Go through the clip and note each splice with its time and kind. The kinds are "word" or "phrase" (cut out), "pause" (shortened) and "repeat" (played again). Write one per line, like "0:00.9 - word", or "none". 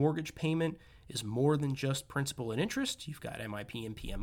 none

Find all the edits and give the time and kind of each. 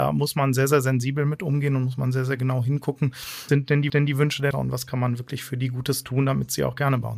0:03.5 - word
0:03.9 - repeat
0:04.5 - word

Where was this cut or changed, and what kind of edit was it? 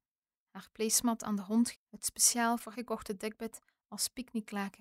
0:01.7 - word
0:02.7 - word

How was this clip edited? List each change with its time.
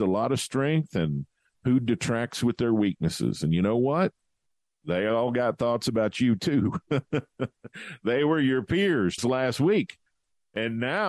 0:09.2 - word

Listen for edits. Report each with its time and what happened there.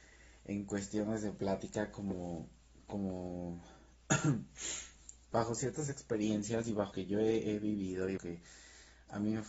0:06.9 - word
0:08.2 - phrase

